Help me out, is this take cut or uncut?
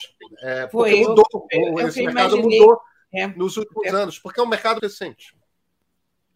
cut